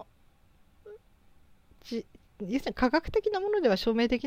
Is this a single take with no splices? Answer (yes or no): yes